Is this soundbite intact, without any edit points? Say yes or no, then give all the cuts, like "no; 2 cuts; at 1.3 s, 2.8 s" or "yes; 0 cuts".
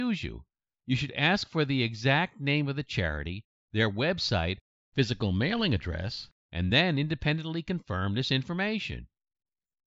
yes; 0 cuts